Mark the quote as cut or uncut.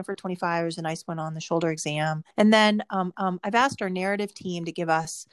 cut